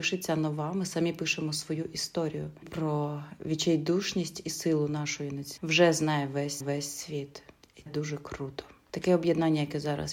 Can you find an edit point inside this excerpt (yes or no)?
yes